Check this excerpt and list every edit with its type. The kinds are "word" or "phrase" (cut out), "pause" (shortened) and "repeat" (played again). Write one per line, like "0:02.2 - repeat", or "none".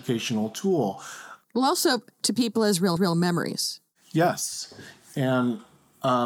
0:02.2 - phrase
0:03.0 - repeat

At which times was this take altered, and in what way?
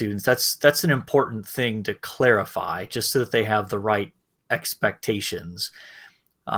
none

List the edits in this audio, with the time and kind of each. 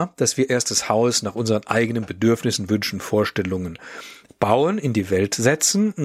none

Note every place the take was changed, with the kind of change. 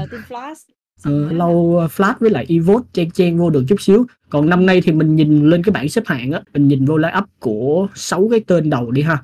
0:01.3 - word
0:06.4 - pause

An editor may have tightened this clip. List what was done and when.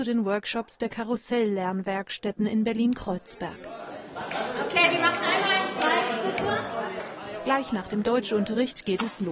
none

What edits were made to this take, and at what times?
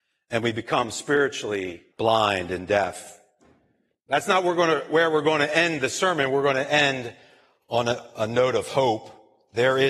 0:01.9 - pause

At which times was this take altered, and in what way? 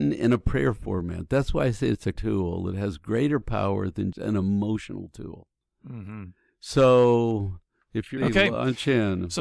0:02.2 - word
0:04.1 - word
0:08.2 - word

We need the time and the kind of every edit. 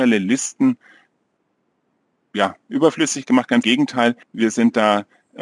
0:03.6 - word
0:04.2 - pause

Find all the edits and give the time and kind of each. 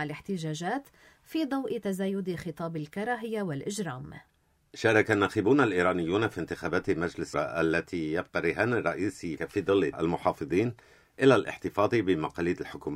0:07.3 - word
0:09.4 - phrase
0:09.9 - word

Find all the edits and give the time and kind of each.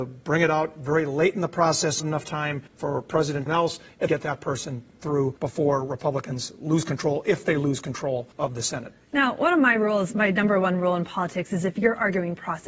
0:02.0 - phrase
0:02.7 - pause
0:03.5 - phrase
0:04.1 - word
0:05.4 - pause
0:08.3 - pause

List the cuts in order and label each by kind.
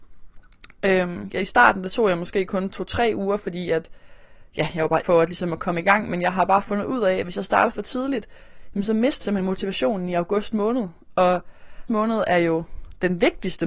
0:05.0 - word
0:09.2 - word
0:11.9 - word

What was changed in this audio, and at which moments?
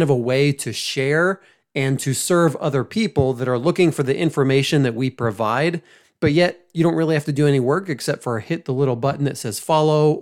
none

